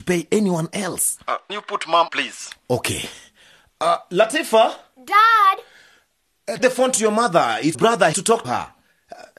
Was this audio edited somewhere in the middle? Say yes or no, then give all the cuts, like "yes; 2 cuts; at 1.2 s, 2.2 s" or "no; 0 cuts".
yes; 6 cuts; at 1.5 s, 2.1 s, 6.6 s, 7.7 s, 8.1 s, 8.4 s